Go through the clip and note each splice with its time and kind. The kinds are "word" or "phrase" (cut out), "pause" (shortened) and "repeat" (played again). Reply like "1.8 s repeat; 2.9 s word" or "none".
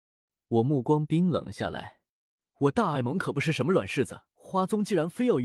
4.3 s pause